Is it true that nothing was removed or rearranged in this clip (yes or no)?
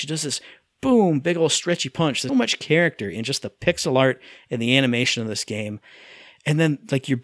no